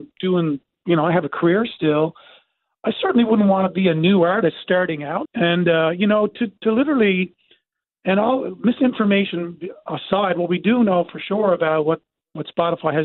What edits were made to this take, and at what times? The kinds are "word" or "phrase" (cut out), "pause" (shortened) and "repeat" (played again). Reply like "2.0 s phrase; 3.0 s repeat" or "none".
5.3 s word